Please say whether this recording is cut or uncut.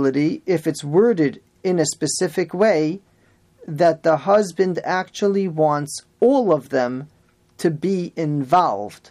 uncut